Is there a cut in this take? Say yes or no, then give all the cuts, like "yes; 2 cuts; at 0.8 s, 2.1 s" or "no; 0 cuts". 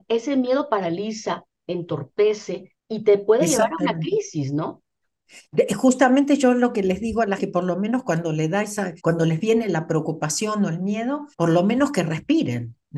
yes; 4 cuts; at 2.8 s, 7.4 s, 9.0 s, 11.3 s